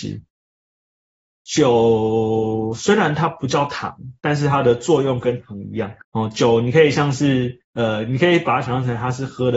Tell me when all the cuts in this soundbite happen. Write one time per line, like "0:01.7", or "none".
0:06.0
0:07.6